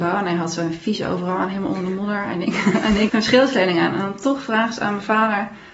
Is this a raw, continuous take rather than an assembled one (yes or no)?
no